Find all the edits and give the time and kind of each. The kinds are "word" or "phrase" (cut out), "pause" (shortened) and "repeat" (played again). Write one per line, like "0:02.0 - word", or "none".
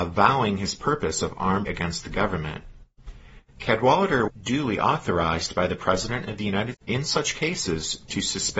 0:01.7 - word
0:04.3 - word
0:06.7 - word